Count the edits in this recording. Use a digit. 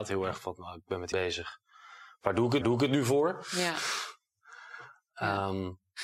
2